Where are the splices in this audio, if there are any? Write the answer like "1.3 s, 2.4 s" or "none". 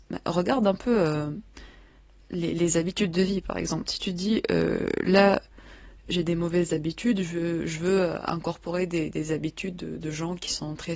none